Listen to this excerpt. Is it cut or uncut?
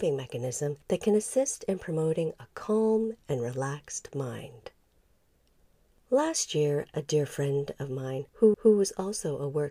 cut